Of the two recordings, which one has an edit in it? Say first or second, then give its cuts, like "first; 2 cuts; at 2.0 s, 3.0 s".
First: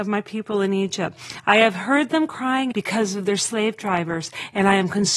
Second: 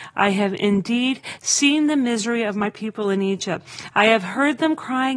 first; 1 cut; at 2.7 s